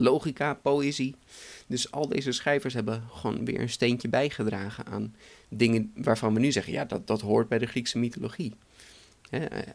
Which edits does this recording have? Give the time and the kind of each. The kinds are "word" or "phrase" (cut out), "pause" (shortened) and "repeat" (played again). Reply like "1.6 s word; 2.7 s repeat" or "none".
none